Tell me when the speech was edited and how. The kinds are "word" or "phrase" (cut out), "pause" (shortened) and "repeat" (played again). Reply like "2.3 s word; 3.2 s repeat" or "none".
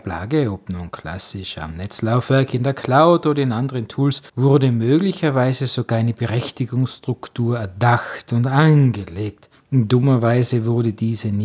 4.3 s pause; 9.5 s pause

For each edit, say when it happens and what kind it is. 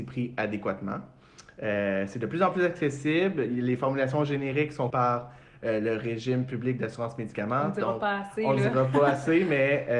4.9 s word

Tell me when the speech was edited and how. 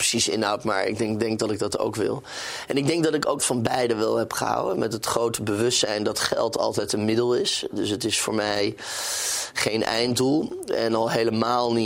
3.4 s word

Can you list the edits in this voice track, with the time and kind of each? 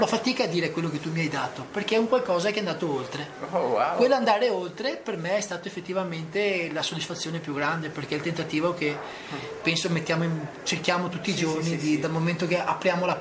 none

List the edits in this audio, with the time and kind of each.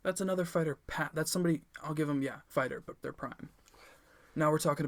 2.5 s word; 3.0 s word

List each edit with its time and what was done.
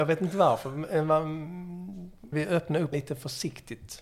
2.3 s word; 2.9 s word

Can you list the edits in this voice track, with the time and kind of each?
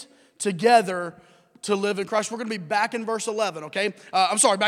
none

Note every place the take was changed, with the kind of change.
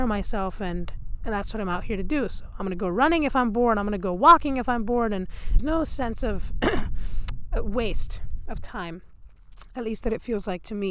5.6 s phrase

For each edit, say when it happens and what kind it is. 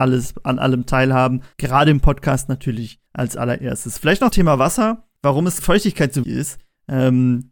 1.5 s pause; 3.1 s pause; 4.3 s word; 5.2 s pause; 5.6 s word; 6.2 s word

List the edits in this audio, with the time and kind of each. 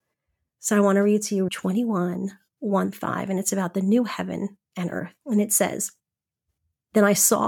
1.5 s word; 2.9 s word; 4.7 s pause; 5.2 s pause

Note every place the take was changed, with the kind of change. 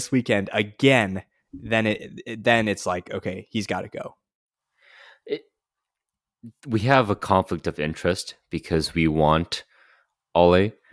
none

